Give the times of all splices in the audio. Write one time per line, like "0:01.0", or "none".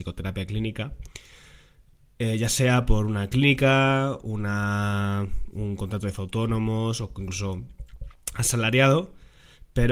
0:06.2